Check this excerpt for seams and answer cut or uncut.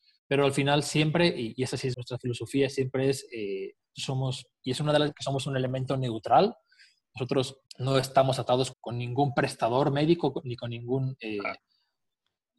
cut